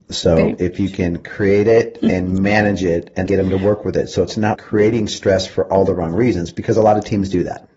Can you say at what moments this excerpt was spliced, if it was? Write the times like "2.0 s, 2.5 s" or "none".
3.3 s, 4.5 s